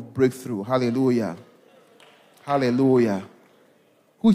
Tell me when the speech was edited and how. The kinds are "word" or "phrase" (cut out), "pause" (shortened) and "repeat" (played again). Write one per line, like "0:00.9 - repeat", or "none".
none